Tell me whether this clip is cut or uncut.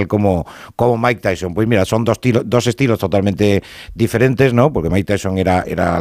uncut